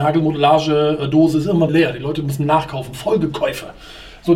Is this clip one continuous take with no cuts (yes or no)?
no